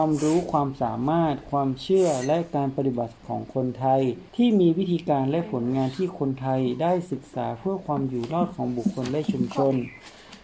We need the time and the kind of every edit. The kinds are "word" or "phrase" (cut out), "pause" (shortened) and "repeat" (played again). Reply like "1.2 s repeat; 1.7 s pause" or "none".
4.3 s pause